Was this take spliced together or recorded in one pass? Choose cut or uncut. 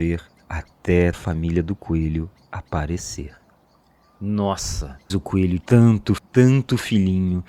cut